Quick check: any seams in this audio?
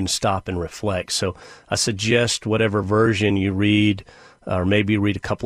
no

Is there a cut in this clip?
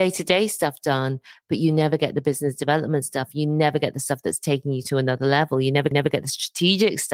yes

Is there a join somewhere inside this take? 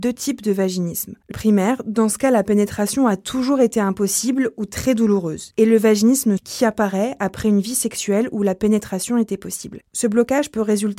yes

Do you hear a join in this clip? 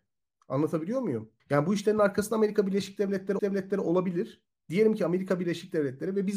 yes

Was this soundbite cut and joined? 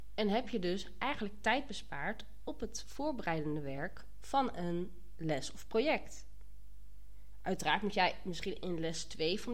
no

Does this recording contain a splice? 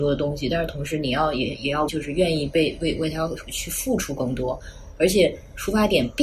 yes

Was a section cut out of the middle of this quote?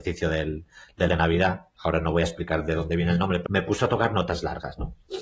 yes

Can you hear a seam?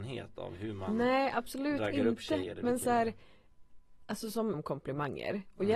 yes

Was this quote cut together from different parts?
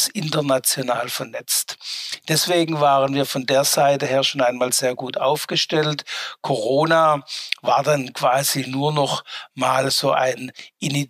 no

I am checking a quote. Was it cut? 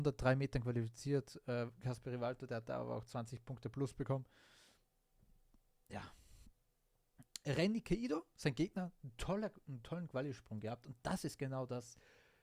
no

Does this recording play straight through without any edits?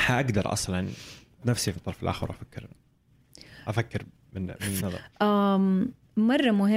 no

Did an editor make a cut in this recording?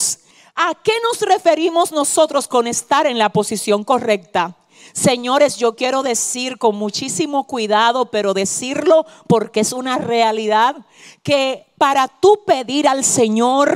no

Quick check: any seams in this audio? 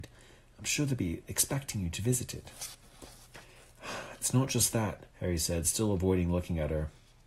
yes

